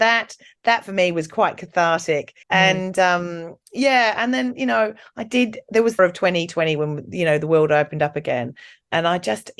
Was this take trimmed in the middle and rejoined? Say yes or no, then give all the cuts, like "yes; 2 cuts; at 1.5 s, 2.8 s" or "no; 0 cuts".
yes; 2 cuts; at 2.4 s, 6.0 s